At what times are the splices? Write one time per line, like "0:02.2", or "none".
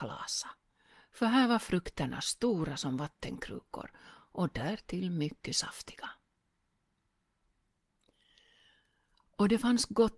none